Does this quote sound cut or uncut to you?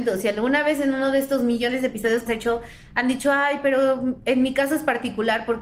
cut